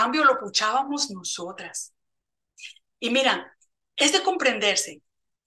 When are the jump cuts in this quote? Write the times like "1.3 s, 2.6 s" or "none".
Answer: none